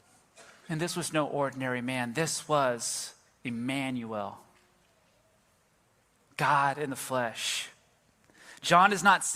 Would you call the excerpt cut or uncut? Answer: uncut